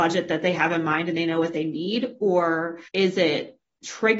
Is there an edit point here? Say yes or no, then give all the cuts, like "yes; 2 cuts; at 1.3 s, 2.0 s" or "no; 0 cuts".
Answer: yes; 1 cut; at 2.9 s